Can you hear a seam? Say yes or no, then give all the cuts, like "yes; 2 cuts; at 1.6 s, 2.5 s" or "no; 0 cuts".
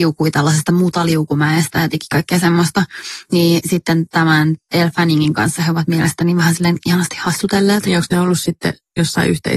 no; 0 cuts